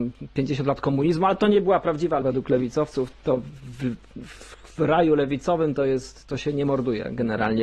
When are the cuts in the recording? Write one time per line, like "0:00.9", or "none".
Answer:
0:02.2
0:03.1

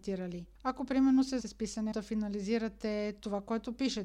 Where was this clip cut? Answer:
0:01.4
0:01.9

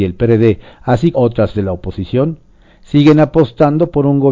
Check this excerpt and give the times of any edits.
0:01.1
0:01.5

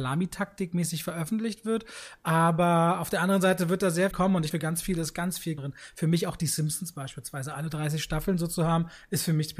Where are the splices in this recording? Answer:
0:04.1
0:04.5
0:05.6

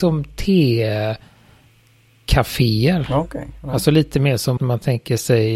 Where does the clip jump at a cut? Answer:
0:04.6

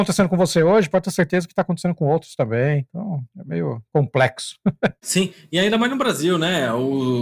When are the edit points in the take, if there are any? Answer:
none

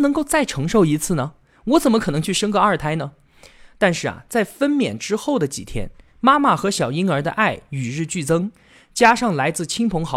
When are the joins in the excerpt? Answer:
none

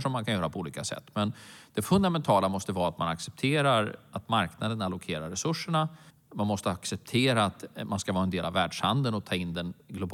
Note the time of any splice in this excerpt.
0:06.1

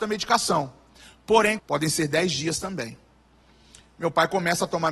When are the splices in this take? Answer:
0:01.6

